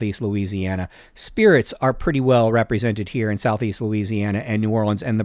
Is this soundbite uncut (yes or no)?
yes